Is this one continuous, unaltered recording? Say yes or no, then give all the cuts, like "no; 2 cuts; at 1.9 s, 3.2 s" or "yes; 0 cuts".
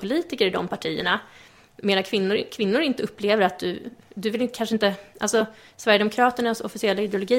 yes; 0 cuts